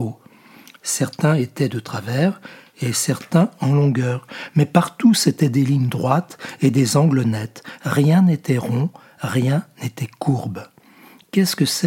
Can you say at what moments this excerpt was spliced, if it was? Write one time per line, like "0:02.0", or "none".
none